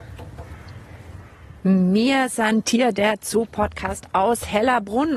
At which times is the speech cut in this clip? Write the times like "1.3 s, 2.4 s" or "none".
none